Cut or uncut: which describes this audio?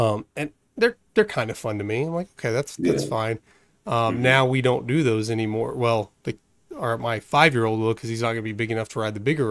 uncut